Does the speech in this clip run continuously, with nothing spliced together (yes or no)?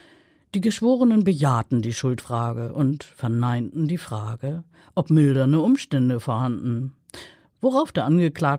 yes